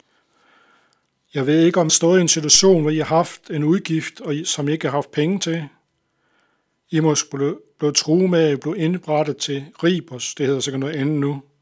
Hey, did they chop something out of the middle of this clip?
yes; 1 cut; at 1.9 s

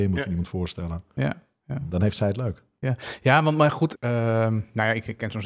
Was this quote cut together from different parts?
yes; 2 cuts; at 1.9 s, 3.9 s

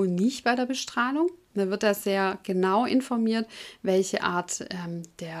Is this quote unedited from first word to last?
yes; 0 cuts

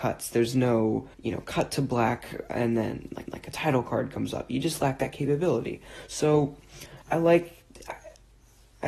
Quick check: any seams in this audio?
yes; 3 cuts; at 1.1 s, 3.3 s, 7.0 s

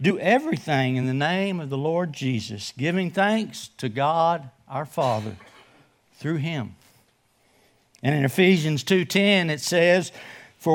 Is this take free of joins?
yes; 0 cuts

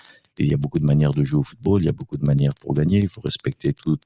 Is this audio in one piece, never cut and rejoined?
yes; 0 cuts

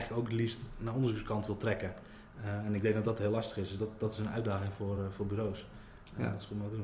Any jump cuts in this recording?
no; 0 cuts

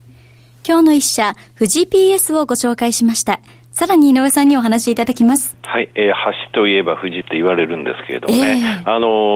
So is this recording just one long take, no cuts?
no; 1 cut; at 7.2 s

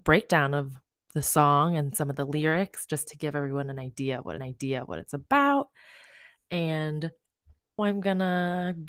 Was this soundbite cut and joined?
yes; 2 cuts; at 4.4 s, 7.8 s

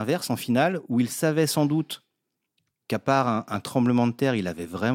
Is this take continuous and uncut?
yes; 0 cuts

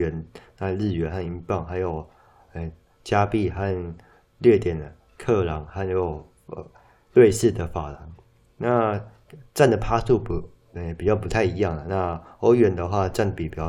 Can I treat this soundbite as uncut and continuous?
yes; 0 cuts

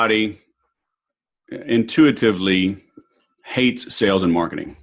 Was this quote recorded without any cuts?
yes; 0 cuts

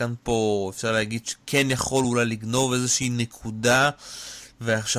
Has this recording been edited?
no; 0 cuts

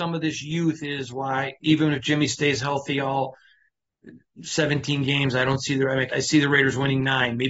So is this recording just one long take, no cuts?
no; 1 cut; at 6.1 s

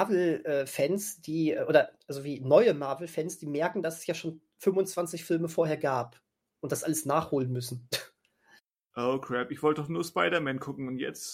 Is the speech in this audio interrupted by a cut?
no; 0 cuts

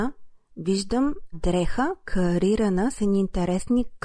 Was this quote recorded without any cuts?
no; 1 cut; at 1.3 s

